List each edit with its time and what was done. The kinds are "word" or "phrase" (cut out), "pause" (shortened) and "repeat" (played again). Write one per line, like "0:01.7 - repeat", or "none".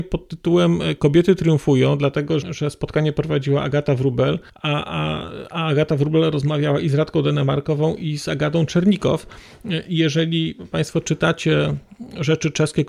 0:02.4 - word
0:04.5 - pause